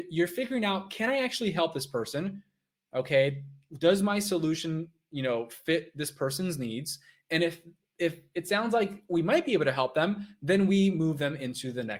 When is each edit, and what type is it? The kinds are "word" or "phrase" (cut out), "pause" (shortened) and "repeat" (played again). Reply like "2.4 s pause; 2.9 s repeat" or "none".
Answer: none